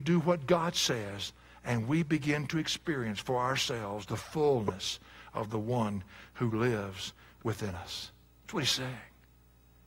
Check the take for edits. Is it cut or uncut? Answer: uncut